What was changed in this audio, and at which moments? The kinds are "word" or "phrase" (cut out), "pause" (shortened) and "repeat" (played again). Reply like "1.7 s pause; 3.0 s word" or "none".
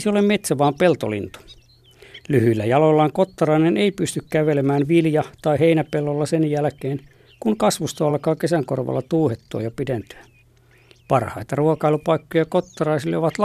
none